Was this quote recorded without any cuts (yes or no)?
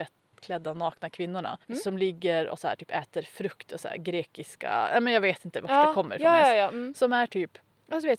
no